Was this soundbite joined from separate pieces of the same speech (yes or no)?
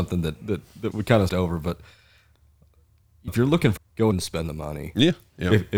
yes